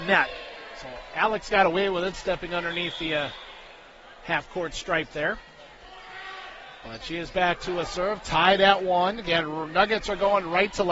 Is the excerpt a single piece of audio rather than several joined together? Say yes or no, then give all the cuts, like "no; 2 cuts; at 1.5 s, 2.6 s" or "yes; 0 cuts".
yes; 0 cuts